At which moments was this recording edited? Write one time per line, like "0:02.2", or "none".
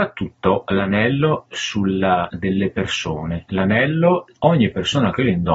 0:01.4
0:02.3
0:04.4